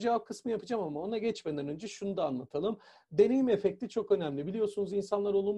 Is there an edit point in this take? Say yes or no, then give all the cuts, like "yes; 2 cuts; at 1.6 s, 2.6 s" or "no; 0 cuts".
no; 0 cuts